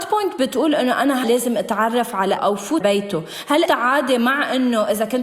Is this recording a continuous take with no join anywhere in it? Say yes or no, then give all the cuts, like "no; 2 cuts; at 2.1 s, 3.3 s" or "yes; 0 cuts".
no; 4 cuts; at 1.2 s, 2.4 s, 2.8 s, 3.7 s